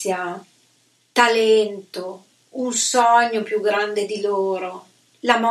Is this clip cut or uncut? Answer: uncut